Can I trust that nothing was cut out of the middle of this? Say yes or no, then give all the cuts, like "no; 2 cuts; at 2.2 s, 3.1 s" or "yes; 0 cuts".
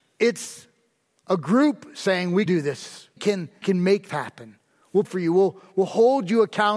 no; 5 cuts; at 2.5 s, 3.2 s, 3.6 s, 4.1 s, 5.0 s